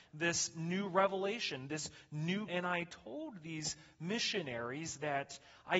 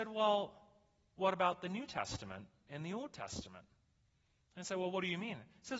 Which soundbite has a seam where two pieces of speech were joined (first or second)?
first